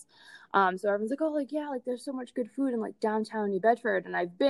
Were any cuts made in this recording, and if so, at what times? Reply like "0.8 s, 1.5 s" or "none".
none

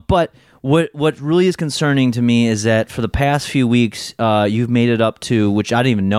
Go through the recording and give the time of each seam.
none

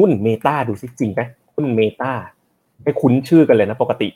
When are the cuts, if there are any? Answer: 1.4 s, 2.5 s

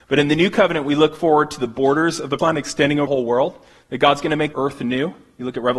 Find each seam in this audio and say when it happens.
2.4 s, 3.1 s, 4.5 s

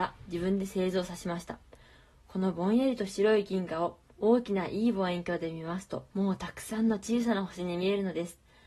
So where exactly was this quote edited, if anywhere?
6.1 s

